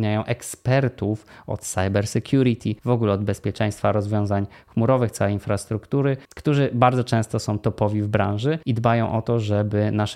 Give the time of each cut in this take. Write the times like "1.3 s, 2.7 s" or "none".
2.8 s, 6.2 s, 8.6 s